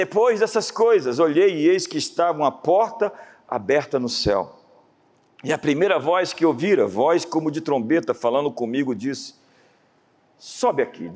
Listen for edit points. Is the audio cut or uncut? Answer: uncut